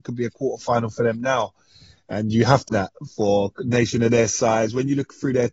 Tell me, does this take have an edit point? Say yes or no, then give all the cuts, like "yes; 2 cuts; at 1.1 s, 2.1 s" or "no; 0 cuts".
yes; 1 cut; at 2.7 s